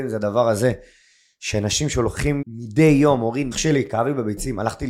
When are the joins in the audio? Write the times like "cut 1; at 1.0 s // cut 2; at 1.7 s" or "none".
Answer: cut 1; at 2.4 s // cut 2; at 3.5 s